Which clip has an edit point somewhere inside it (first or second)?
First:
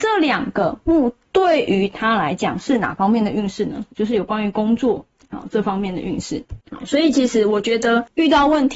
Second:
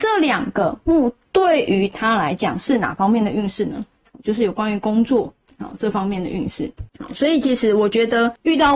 first